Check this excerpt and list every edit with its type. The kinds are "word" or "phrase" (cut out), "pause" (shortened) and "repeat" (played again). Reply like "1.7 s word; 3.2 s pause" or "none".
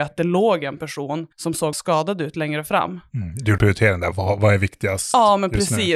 1.3 s pause; 1.7 s word; 3.6 s word